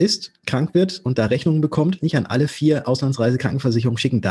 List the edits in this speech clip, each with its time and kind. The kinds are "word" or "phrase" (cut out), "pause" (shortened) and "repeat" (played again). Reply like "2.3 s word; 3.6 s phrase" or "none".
2.0 s phrase